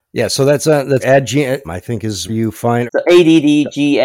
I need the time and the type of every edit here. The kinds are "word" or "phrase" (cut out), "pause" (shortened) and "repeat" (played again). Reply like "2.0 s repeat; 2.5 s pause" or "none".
1.0 s word; 1.6 s word; 2.3 s word; 2.9 s word